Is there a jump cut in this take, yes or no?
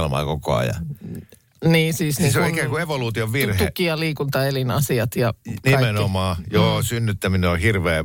no